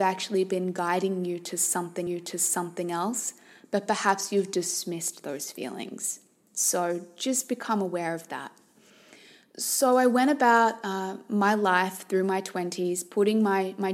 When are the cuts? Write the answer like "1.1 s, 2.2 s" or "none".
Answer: 2.1 s